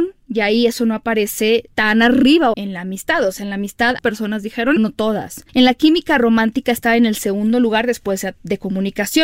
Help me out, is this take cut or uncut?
cut